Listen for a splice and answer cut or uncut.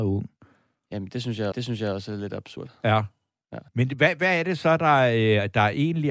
cut